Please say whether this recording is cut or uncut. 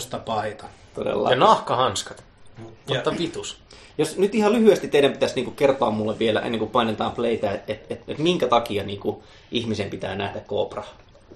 uncut